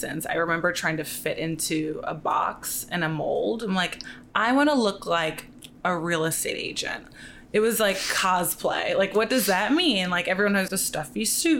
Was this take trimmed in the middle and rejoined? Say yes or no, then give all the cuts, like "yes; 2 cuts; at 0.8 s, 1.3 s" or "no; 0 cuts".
yes; 1 cut; at 10.7 s